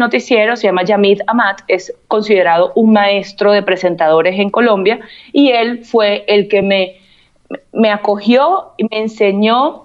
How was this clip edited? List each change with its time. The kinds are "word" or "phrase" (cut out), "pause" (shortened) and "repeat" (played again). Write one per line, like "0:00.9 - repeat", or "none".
none